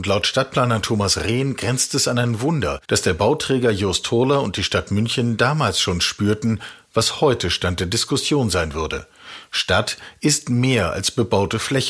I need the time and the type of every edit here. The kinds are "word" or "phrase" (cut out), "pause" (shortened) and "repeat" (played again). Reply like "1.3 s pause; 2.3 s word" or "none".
2.8 s pause